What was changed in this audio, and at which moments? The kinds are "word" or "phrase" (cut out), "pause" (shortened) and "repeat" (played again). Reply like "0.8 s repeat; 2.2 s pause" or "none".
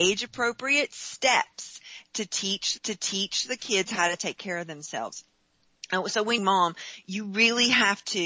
2.8 s repeat; 6.4 s phrase